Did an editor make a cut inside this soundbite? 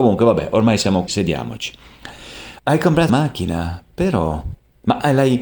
yes; 3 cuts; at 1.1 s, 2.6 s, 3.1 s

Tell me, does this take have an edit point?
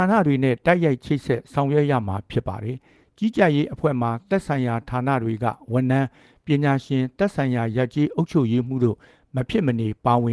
no; 0 cuts

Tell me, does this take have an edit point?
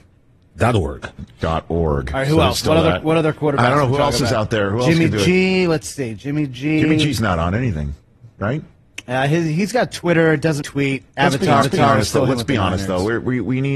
yes; 2 cuts; at 10.6 s, 11.6 s

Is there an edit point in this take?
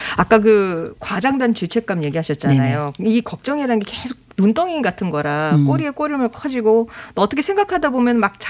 no; 0 cuts

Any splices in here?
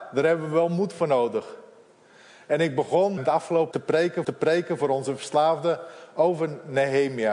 yes; 3 cuts; at 3.2 s, 3.7 s, 4.2 s

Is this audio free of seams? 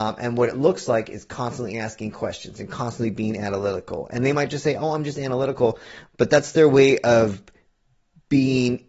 yes; 0 cuts

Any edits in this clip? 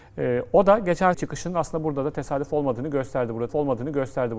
yes; 2 cuts; at 1.1 s, 3.5 s

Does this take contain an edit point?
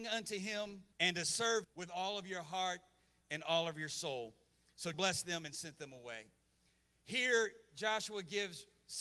yes; 3 cuts; at 0.9 s, 1.6 s, 4.9 s

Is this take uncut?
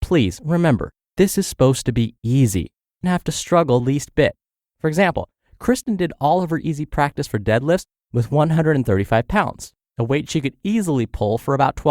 no; 2 cuts; at 3.0 s, 3.8 s

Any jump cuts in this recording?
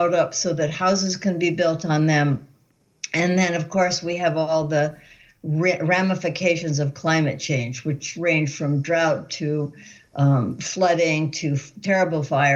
no; 0 cuts

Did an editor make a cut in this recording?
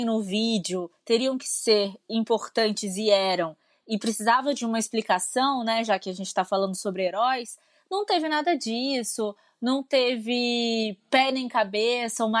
no; 0 cuts

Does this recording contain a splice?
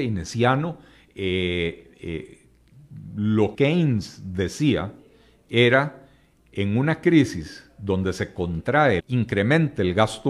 yes; 2 cuts; at 3.5 s, 9.0 s

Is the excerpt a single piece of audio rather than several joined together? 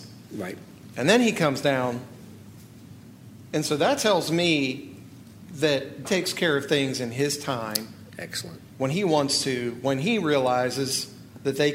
no; 2 cuts; at 6.0 s, 8.7 s

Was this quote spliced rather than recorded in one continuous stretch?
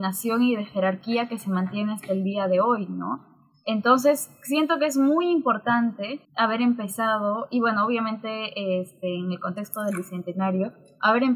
yes; 1 cut; at 6.2 s

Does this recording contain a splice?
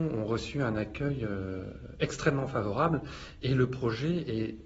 no; 0 cuts

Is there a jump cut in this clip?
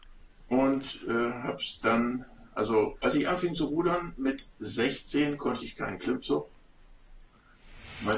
no; 0 cuts

